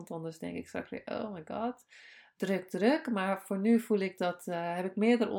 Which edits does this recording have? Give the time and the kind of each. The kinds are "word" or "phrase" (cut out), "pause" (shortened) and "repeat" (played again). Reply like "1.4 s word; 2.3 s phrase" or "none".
none